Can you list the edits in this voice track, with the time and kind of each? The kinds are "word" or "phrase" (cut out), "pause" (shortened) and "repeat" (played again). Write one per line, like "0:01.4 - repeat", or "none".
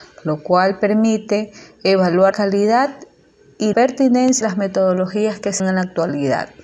0:02.3 - word
0:03.7 - word
0:04.4 - word
0:05.6 - word

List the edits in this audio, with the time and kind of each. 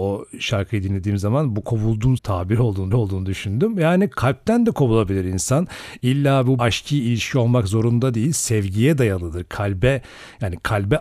0:01.6 - word
0:02.2 - phrase
0:02.9 - repeat
0:06.6 - word

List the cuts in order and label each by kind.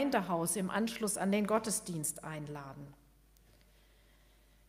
none

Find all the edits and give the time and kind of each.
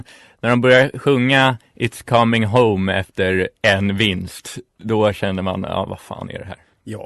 0:04.7 - pause

